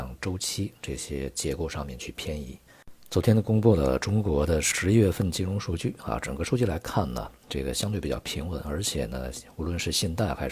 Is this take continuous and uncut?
yes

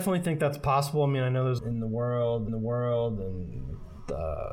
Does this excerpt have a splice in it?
yes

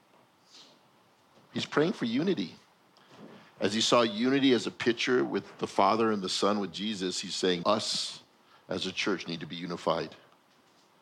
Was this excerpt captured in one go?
no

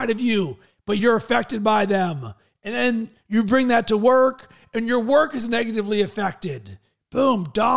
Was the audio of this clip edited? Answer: no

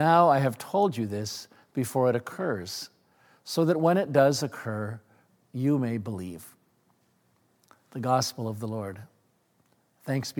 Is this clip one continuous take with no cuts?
yes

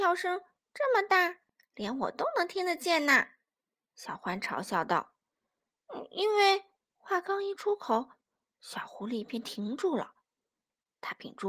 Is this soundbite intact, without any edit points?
no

